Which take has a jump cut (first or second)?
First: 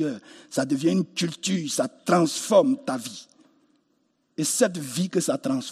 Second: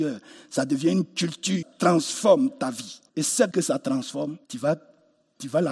second